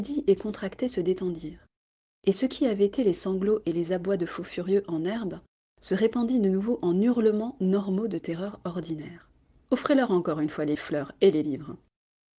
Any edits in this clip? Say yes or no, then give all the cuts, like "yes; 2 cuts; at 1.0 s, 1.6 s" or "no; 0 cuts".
no; 0 cuts